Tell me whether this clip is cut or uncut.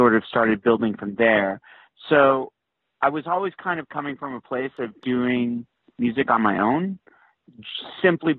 uncut